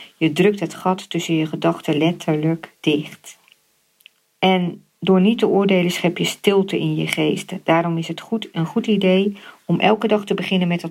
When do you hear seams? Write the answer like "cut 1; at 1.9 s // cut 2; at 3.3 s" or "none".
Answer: none